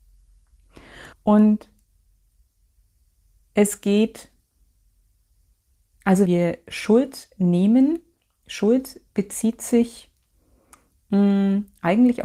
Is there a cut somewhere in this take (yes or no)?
yes